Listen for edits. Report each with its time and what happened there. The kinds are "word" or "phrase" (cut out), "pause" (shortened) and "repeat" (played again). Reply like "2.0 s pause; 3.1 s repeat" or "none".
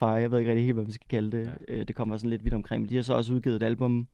none